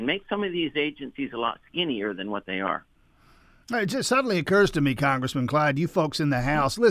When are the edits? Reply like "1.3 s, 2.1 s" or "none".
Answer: none